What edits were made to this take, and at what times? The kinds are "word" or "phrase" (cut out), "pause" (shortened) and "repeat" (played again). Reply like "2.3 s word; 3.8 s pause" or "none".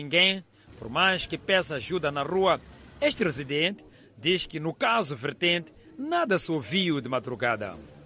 none